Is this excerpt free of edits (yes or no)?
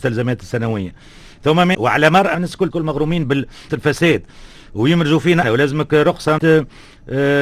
no